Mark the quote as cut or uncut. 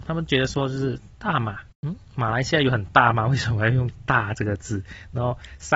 cut